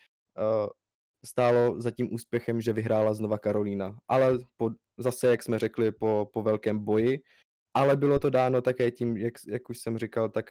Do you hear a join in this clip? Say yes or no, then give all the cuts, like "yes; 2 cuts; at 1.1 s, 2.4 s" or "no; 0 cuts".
no; 0 cuts